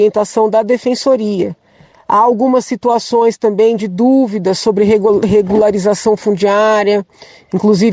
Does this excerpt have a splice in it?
no; 0 cuts

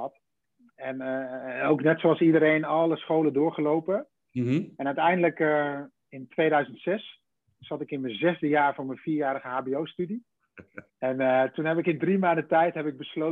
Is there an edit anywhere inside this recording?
yes; 1 cut; at 10.9 s

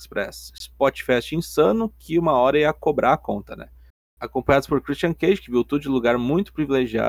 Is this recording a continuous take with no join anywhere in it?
yes; 0 cuts

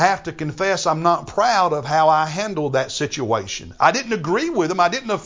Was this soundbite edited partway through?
no; 0 cuts

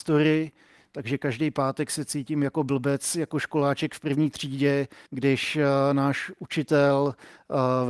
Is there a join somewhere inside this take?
yes; 1 cut; at 5.1 s

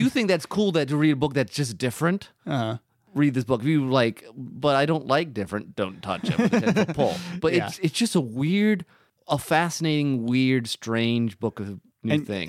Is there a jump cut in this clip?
no; 0 cuts

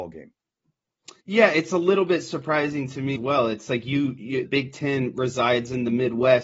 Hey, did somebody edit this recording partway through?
yes; 3 cuts; at 1.2 s, 3.2 s, 4.4 s

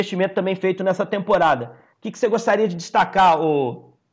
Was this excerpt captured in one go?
yes; 0 cuts

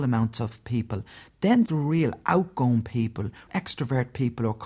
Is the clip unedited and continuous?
no; 2 cuts; at 1.7 s, 3.5 s

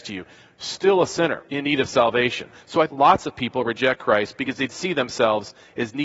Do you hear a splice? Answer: yes; 3 cuts; at 1.5 s, 2.9 s, 4.7 s

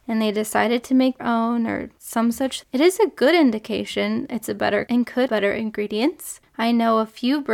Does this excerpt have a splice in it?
yes; 4 cuts; at 1.2 s, 2.6 s, 4.9 s, 5.3 s

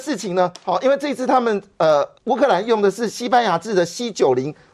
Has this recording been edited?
yes; 1 cut; at 2.2 s

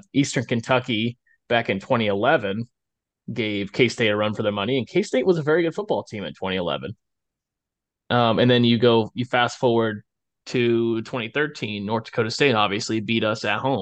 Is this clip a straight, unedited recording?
yes; 0 cuts

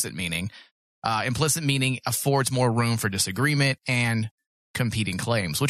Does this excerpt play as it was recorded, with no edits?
yes; 0 cuts

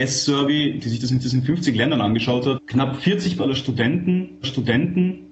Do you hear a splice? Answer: yes; 4 cuts; at 1.2 s, 2.6 s, 3.4 s, 4.4 s

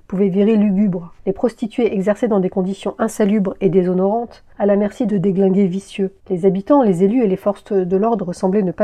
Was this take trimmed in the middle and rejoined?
yes; 3 cuts; at 1.2 s, 4.5 s, 6.2 s

